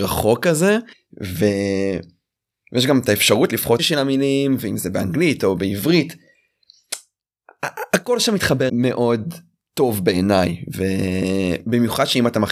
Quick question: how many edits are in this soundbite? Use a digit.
3